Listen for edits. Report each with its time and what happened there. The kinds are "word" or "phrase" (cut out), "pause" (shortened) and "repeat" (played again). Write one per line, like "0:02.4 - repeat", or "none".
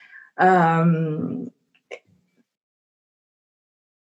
none